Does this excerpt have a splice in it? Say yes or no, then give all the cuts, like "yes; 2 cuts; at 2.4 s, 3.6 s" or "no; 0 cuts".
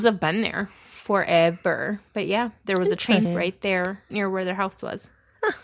yes; 2 cuts; at 3.2 s, 4.1 s